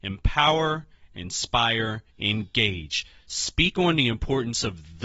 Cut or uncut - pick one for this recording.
cut